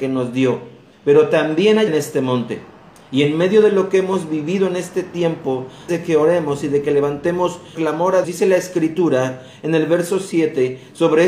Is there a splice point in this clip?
yes; 6 cuts; at 0.9 s, 1.9 s, 2.8 s, 5.9 s, 7.7 s, 8.2 s

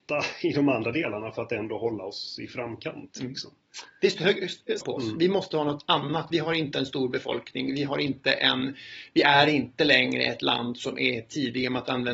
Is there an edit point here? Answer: yes; 1 cut; at 4.8 s

